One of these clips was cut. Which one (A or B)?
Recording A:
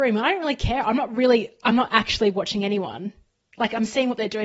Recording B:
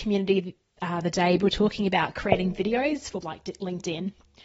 B